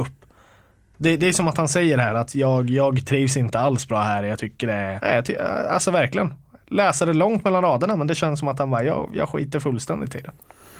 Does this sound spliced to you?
yes; 1 cut; at 5.0 s

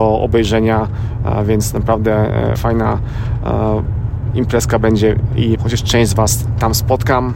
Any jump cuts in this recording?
yes; 2 cuts; at 2.6 s, 5.6 s

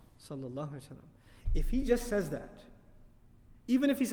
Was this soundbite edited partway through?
no; 0 cuts

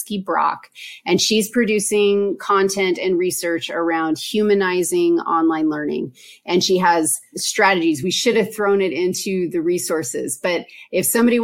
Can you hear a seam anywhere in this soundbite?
no; 0 cuts

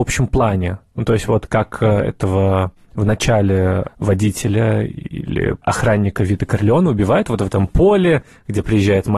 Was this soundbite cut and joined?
no; 0 cuts

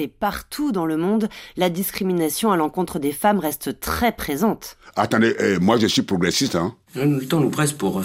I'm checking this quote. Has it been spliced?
yes; 1 cut; at 6.8 s

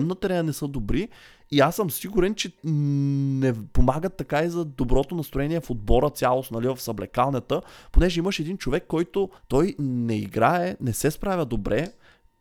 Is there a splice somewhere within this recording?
yes; 2 cuts; at 2.6 s, 9.4 s

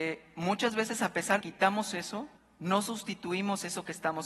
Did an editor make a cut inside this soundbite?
yes; 2 cuts; at 1.4 s, 2.4 s

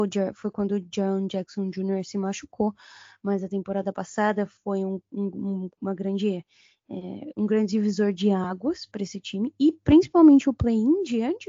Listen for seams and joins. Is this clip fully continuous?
yes; 0 cuts

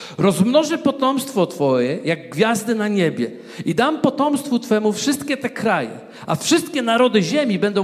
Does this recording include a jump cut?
no; 0 cuts

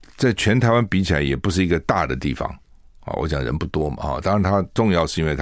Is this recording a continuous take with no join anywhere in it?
yes; 0 cuts

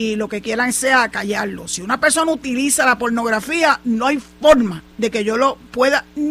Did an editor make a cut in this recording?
yes; 1 cut; at 4.9 s

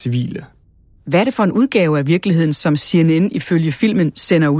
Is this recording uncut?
yes; 0 cuts

